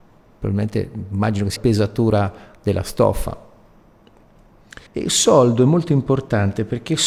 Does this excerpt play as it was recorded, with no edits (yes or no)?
no